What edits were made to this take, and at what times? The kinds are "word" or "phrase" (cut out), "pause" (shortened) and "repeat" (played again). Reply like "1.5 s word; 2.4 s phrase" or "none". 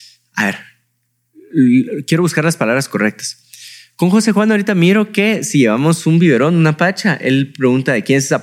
none